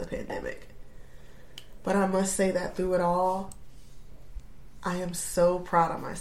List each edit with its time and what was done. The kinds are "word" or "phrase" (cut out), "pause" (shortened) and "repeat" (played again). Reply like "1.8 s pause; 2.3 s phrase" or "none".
none